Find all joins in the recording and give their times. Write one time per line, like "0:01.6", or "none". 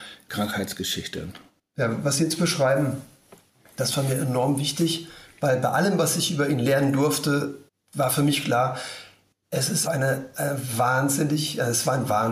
0:07.7
0:09.9